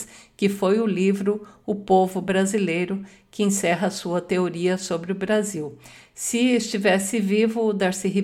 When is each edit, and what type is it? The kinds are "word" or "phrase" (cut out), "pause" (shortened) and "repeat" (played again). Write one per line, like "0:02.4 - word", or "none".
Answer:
none